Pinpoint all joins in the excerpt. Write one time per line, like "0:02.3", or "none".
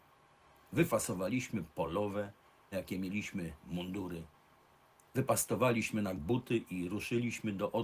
0:02.7
0:06.2